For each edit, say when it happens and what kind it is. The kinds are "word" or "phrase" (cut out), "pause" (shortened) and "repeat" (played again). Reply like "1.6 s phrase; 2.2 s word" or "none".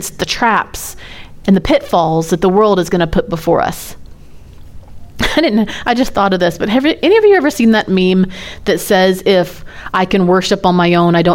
none